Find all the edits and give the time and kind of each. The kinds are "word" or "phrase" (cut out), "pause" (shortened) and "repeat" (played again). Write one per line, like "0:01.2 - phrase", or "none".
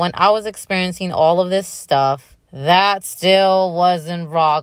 0:02.4 - pause